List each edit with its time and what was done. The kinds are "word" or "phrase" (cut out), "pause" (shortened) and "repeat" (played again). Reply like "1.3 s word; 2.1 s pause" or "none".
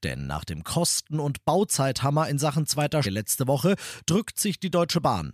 3.0 s word

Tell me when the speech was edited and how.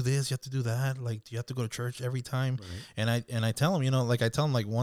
none

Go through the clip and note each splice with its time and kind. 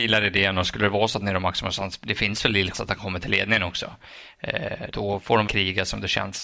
2.7 s word; 4.9 s word; 5.5 s word

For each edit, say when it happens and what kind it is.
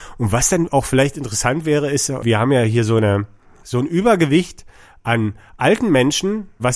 none

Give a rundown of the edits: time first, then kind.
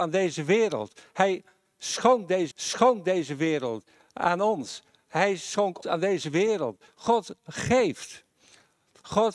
2.5 s repeat; 5.8 s word

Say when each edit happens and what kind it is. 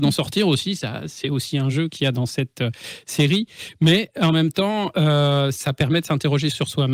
none

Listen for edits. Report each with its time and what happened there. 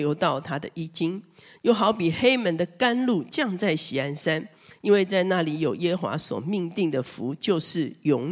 none

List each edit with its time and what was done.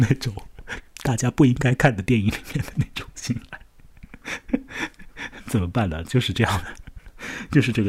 none

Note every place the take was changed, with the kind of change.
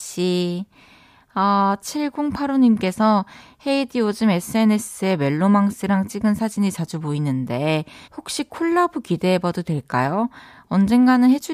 8.0 s pause

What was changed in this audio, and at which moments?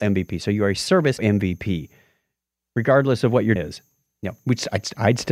1.2 s word; 3.6 s word

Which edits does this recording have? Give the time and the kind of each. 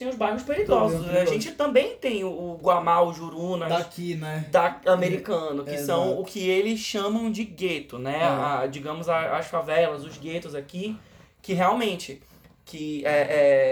none

